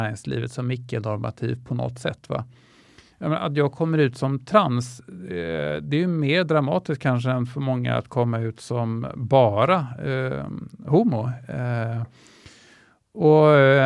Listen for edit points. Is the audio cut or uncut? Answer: uncut